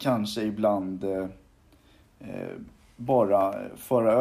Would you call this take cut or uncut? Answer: uncut